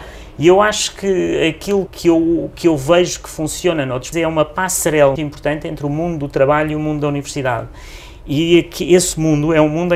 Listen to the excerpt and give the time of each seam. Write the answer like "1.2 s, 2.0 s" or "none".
1.9 s, 4.1 s, 5.2 s